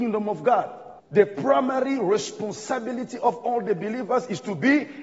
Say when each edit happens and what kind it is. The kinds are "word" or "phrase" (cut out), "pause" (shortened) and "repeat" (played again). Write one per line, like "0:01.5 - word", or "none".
0:01.0 - pause